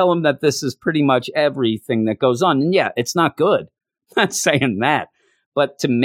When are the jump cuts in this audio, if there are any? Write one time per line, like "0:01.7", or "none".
none